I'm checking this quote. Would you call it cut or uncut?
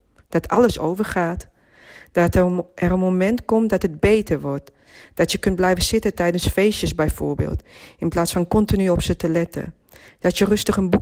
uncut